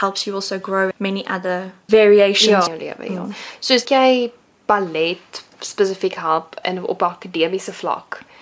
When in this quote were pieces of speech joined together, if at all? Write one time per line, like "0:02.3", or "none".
0:00.9
0:01.9
0:02.7
0:03.8
0:06.6